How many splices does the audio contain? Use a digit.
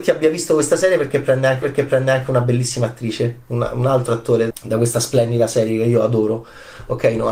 2